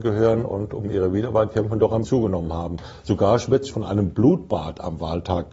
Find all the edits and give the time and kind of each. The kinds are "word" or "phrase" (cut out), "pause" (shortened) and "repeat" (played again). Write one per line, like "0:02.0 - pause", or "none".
0:02.0 - word
0:03.7 - word